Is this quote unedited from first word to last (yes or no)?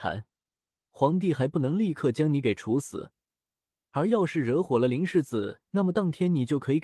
yes